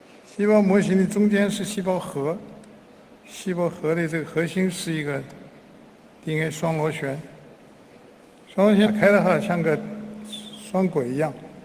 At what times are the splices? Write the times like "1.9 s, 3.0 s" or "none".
none